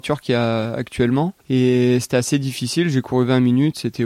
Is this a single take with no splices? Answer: no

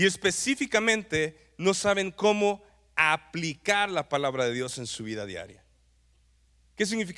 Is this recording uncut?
yes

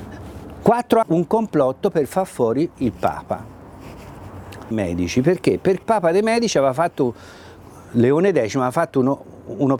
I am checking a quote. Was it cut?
yes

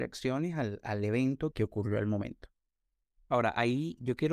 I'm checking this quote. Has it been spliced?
yes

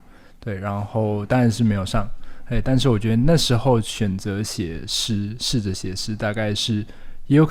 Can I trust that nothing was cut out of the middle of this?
yes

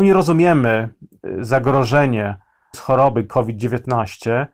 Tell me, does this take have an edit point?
yes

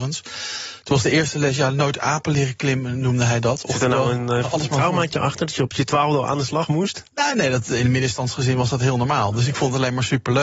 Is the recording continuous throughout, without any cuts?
yes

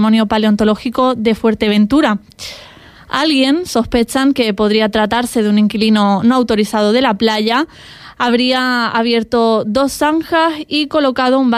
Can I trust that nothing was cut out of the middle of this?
yes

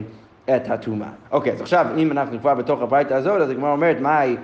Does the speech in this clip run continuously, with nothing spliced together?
no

